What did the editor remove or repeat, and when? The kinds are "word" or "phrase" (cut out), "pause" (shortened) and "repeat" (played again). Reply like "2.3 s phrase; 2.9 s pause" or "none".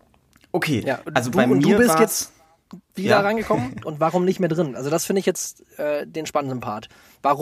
none